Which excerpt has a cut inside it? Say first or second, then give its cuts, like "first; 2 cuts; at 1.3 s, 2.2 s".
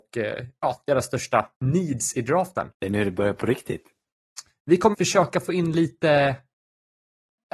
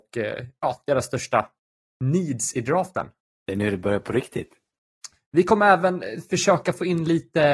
first; 3 cuts; at 1.5 s, 2.7 s, 4.9 s